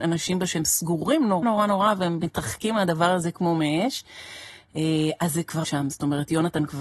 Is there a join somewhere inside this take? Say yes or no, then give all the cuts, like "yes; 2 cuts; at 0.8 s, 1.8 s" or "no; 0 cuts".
yes; 2 cuts; at 1.4 s, 5.6 s